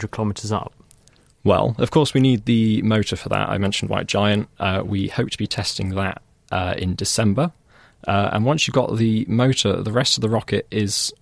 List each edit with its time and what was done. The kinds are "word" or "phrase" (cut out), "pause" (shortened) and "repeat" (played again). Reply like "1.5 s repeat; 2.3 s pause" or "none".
none